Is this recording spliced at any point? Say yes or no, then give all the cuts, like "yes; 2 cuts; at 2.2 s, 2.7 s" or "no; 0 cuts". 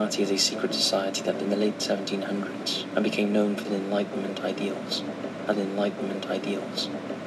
yes; 3 cuts; at 1.3 s, 3.6 s, 5.5 s